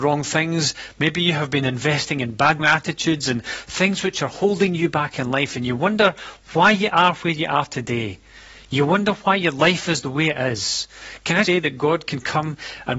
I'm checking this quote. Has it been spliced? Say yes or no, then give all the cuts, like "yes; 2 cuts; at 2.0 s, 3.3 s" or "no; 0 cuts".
yes; 2 cuts; at 2.6 s, 11.4 s